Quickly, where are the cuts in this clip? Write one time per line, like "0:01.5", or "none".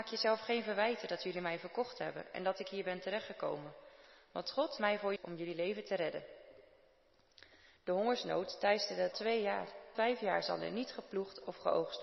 0:04.8
0:05.2
0:09.1
0:09.9